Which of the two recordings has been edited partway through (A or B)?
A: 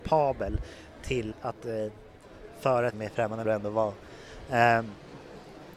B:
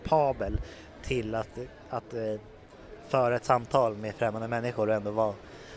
A